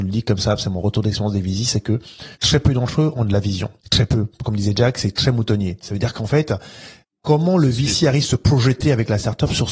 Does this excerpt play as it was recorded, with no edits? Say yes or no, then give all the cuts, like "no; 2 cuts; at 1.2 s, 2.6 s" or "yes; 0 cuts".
no; 3 cuts; at 2.3 s, 3.8 s, 7.0 s